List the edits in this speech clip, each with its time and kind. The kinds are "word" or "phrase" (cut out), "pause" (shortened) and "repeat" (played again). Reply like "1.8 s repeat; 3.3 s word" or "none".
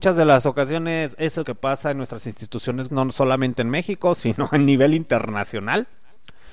1.4 s word; 2.9 s word